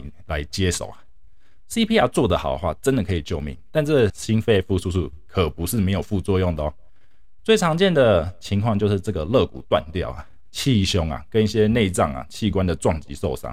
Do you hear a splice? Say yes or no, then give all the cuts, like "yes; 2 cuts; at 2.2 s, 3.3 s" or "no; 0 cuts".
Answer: yes; 1 cut; at 4.1 s